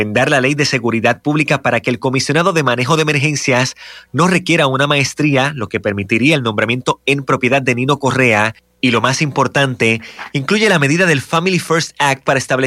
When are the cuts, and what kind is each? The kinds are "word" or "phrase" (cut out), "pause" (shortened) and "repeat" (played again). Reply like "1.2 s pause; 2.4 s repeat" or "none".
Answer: none